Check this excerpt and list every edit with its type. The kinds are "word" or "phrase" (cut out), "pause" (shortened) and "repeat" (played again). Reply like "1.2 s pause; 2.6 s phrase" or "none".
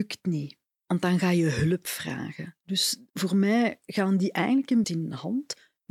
4.8 s phrase